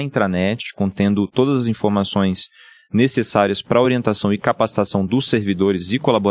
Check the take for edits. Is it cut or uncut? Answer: uncut